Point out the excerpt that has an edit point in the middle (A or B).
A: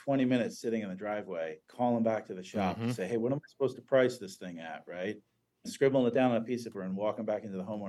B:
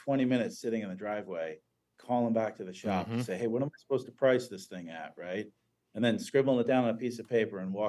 A